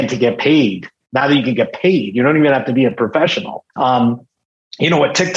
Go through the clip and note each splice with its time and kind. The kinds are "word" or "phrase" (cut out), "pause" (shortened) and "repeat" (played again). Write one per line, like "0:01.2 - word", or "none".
0:03.7 - pause